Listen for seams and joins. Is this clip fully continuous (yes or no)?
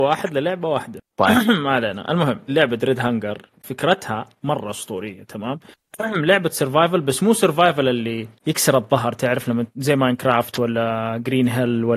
no